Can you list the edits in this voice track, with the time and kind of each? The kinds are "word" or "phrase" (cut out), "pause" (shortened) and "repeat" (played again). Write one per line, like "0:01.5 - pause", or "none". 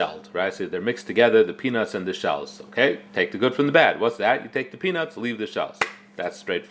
none